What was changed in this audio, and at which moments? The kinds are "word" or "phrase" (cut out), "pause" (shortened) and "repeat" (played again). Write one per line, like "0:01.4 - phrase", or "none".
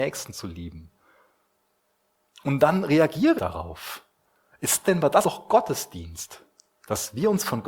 0:03.4 - word
0:04.8 - word
0:05.2 - word